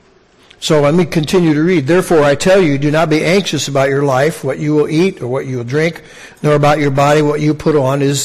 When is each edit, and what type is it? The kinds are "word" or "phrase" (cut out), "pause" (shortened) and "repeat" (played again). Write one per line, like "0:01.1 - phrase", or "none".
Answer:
none